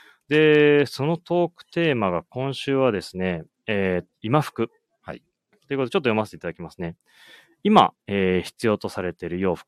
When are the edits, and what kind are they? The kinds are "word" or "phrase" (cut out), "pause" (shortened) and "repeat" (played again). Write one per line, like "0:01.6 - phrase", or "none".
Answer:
0:04.1 - word